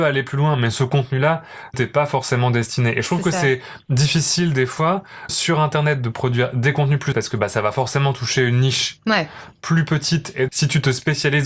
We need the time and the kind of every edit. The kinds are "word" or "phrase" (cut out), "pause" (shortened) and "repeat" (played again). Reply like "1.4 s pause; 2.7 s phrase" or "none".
1.7 s word; 5.3 s word; 7.1 s word; 10.5 s word